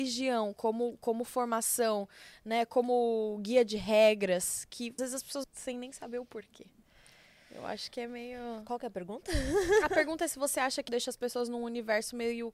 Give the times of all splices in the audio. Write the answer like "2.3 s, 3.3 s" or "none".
5.0 s, 5.4 s, 10.9 s